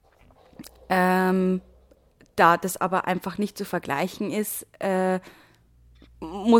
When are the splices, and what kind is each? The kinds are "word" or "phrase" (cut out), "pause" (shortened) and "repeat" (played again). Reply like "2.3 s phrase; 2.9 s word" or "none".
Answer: none